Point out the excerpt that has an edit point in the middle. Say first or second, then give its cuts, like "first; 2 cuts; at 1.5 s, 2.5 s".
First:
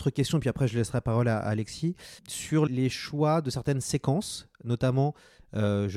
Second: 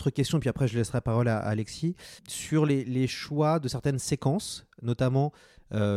first; 1 cut; at 2.7 s